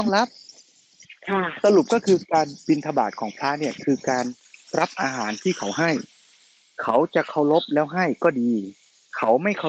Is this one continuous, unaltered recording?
yes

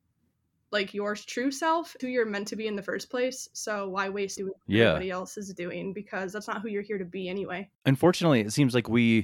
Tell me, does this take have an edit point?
yes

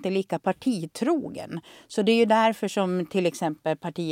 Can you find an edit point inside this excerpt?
no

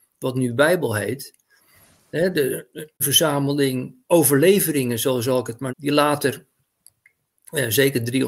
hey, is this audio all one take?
no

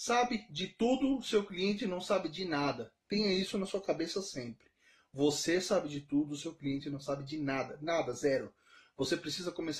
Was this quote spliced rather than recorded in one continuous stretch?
no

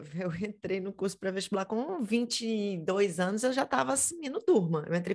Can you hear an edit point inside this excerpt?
no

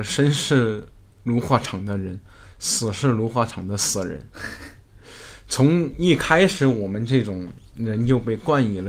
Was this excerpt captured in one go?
yes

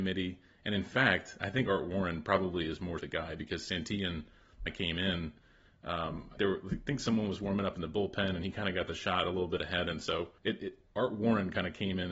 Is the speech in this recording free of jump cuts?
no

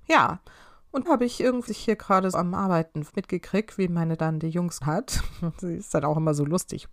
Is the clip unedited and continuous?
no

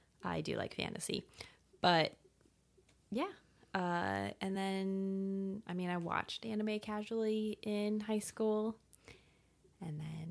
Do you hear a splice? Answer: no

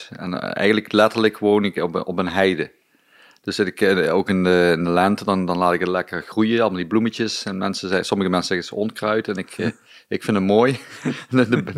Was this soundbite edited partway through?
no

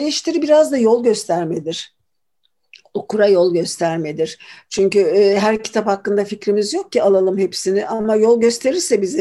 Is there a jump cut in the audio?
no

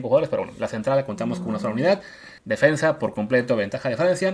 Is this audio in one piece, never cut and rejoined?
no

